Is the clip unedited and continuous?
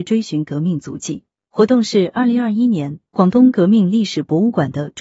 yes; 0 cuts

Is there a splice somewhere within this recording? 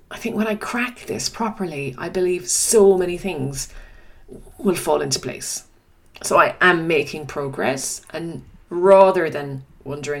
yes; 1 cut; at 8.6 s

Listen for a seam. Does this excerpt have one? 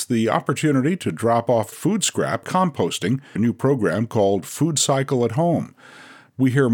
yes; 3 cuts; at 1.7 s, 2.4 s, 3.4 s

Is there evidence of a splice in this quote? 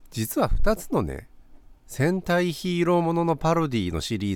no; 0 cuts

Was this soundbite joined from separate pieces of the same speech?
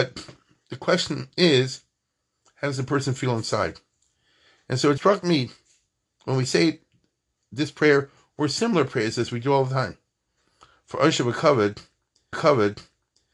yes; 2 cuts; at 5.0 s, 12.3 s

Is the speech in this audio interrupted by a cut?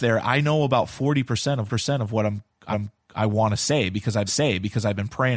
yes; 3 cuts; at 1.7 s, 2.7 s, 4.3 s

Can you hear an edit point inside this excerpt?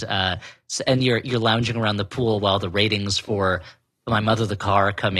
no; 0 cuts

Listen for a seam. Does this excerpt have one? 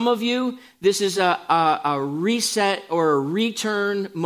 no; 0 cuts

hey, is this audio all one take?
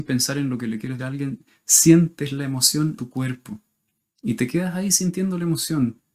no; 2 cuts; at 1.0 s, 3.0 s

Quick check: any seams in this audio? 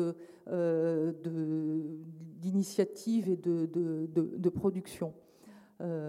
no; 0 cuts

